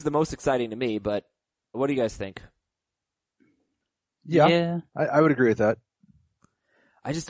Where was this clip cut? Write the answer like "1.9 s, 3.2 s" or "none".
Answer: 1.7 s, 4.9 s

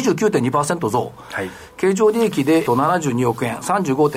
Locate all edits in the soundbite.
2.7 s

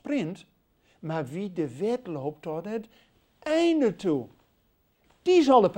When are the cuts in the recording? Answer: none

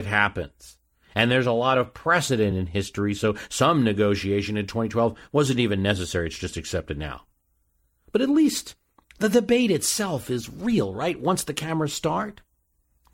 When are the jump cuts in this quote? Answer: none

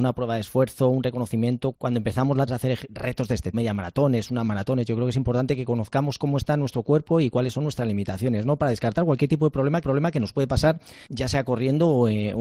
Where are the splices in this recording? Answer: 1.7 s, 2.5 s, 2.9 s, 3.5 s, 9.8 s, 11.1 s

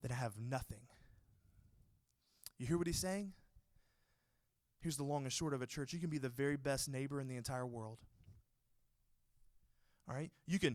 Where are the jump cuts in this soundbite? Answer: none

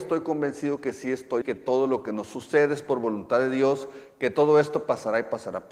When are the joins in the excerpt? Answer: 1.4 s

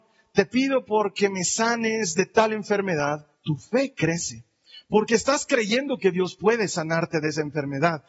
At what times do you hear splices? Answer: 3.3 s

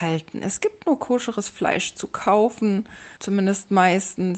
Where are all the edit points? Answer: 3.2 s

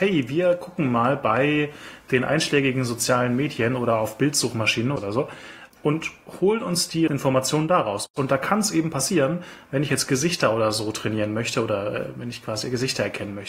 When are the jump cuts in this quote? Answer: 7.1 s

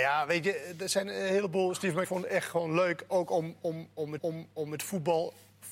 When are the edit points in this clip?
2.0 s, 4.2 s

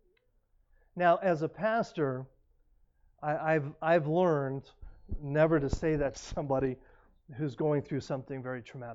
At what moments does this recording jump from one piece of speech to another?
6.1 s

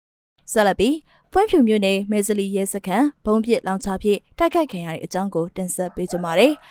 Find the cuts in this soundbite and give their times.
none

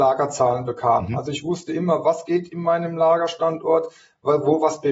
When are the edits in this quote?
none

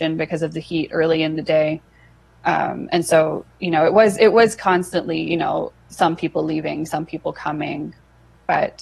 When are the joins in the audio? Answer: none

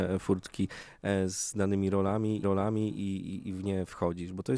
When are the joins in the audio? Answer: 2.4 s

